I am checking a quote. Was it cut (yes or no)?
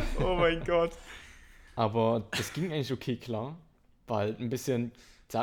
no